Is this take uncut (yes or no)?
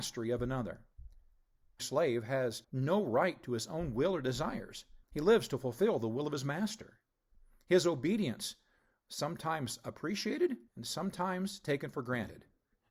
no